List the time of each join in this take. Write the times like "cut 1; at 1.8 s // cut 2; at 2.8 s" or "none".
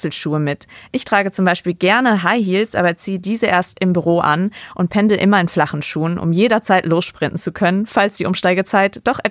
none